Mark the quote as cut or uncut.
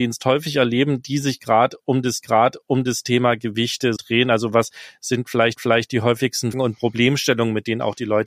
cut